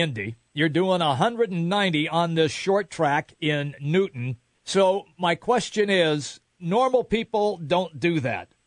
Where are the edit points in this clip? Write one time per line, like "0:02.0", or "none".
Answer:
0:04.5